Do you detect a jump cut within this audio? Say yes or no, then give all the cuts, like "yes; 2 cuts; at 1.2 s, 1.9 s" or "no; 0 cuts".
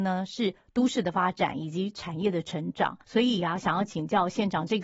yes; 1 cut; at 3.0 s